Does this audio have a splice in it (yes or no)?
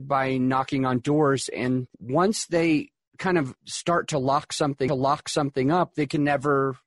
yes